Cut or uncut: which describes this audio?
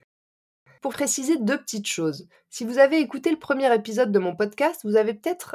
cut